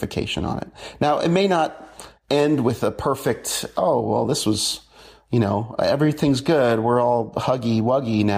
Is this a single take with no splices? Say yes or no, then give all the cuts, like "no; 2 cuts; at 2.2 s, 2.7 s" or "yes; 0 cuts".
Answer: yes; 0 cuts